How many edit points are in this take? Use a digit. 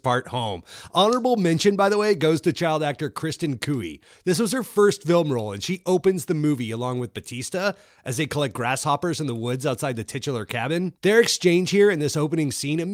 0